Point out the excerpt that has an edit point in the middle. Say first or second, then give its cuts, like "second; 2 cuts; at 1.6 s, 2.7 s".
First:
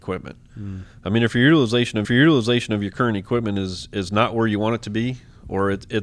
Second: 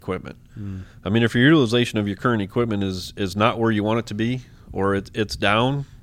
first; 1 cut; at 2.0 s